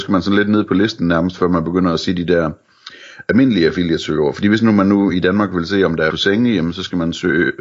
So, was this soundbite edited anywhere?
yes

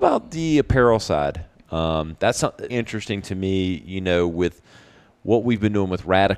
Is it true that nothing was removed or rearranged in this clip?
no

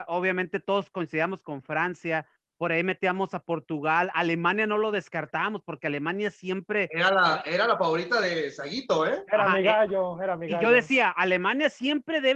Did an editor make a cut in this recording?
no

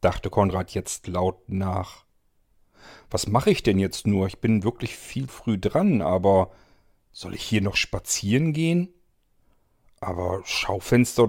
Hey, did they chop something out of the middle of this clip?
yes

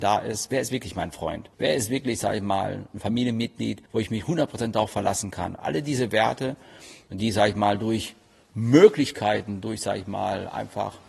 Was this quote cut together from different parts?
yes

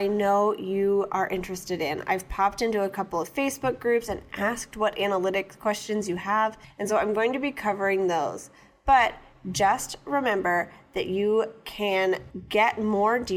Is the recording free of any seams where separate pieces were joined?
yes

